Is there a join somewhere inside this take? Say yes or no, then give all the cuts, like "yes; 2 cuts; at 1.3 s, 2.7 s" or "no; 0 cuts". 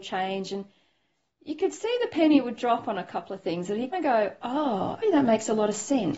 yes; 2 cuts; at 3.9 s, 5.0 s